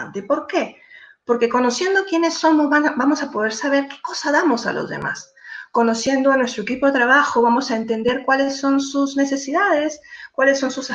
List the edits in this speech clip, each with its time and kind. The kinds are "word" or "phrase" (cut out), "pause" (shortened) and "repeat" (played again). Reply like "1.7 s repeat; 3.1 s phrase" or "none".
none